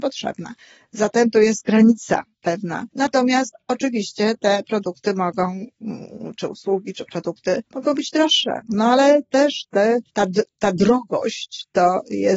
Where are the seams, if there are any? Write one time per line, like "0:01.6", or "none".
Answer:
0:02.9
0:07.7
0:10.1